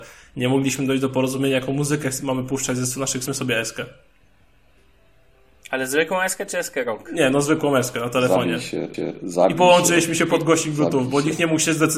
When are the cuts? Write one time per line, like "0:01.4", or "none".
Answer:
0:03.3
0:08.9